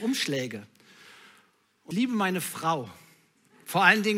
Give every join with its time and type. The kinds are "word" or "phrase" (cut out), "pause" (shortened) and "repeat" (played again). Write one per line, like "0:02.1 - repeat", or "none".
0:01.9 - word